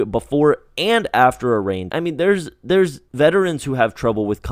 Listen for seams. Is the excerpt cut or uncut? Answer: cut